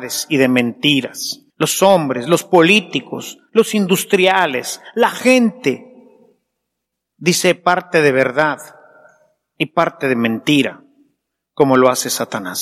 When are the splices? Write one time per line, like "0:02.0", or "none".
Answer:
0:01.5